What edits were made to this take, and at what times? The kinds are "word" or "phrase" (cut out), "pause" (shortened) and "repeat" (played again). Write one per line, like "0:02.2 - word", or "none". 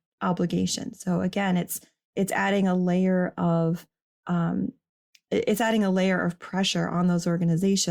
none